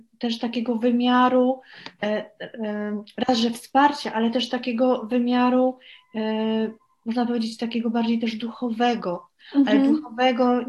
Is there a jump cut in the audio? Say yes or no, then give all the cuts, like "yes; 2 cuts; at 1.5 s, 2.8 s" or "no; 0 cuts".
no; 0 cuts